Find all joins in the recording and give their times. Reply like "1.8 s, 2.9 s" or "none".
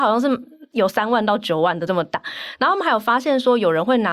1.9 s